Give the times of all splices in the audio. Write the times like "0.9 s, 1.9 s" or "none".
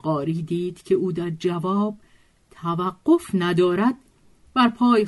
none

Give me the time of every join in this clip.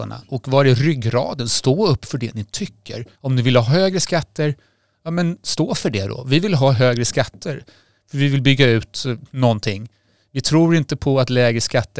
3.1 s

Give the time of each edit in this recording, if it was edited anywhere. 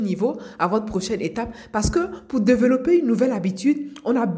none

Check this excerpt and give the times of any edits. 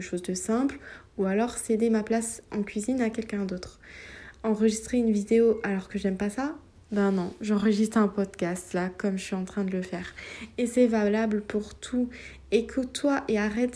none

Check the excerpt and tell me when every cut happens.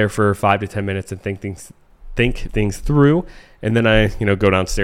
2.5 s

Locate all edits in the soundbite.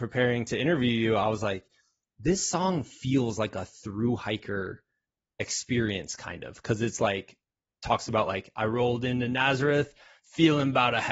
none

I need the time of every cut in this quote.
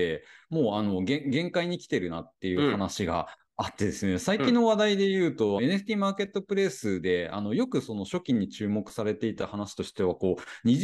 5.6 s

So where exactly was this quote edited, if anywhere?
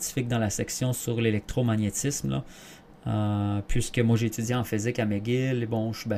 none

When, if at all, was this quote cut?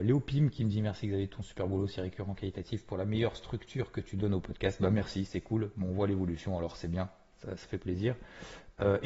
none

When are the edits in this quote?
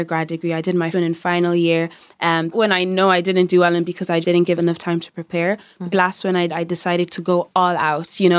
0.9 s, 2.5 s, 4.2 s, 4.6 s, 5.9 s, 6.5 s

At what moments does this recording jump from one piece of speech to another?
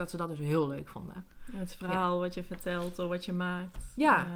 none

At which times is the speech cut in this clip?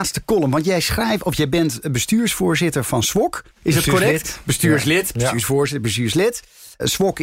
3.5 s

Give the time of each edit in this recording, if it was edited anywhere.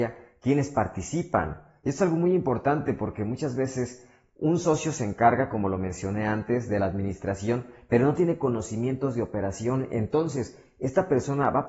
none

